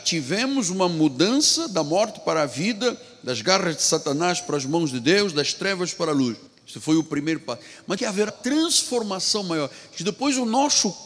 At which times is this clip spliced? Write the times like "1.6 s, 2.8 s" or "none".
6.5 s, 8.0 s, 8.3 s